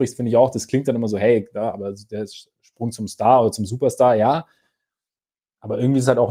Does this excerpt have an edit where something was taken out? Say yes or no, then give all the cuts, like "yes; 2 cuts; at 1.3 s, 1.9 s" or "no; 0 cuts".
no; 0 cuts